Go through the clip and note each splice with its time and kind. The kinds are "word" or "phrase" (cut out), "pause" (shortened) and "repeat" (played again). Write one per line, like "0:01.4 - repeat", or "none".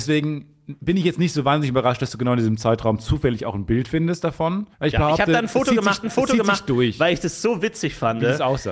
0:04.7 - pause
0:06.0 - repeat